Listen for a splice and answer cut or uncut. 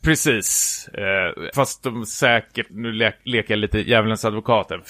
cut